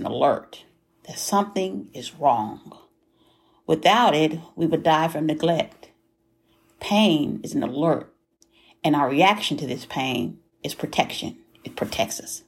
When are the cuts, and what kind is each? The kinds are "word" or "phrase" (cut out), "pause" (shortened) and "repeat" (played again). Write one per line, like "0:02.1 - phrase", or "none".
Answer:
none